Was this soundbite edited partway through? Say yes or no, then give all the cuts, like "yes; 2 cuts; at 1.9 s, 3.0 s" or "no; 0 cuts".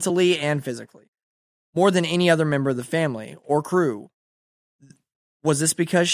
no; 0 cuts